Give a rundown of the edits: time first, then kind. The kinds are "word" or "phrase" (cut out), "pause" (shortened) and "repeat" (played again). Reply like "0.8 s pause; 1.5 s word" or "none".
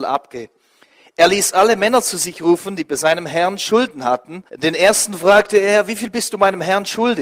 4.5 s pause